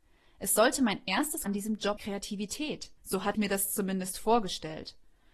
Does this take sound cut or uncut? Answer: cut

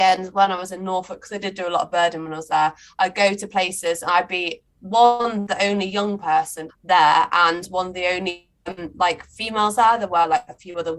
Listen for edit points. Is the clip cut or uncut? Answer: cut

